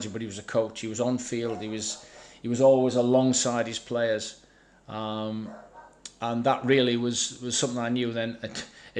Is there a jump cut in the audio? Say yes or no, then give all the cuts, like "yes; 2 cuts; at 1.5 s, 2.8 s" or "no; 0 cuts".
no; 0 cuts